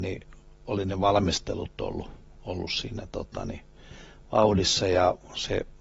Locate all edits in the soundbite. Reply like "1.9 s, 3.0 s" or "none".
none